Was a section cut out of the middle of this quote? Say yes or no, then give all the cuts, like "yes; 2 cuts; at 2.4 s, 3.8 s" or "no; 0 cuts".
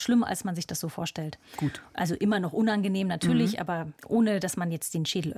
yes; 1 cut; at 4.0 s